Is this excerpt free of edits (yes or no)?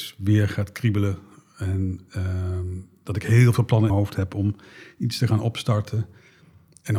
no